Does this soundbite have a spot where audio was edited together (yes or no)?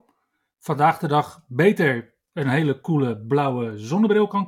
no